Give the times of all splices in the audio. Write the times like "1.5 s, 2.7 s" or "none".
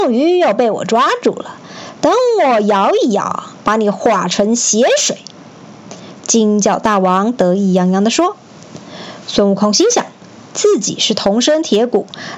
none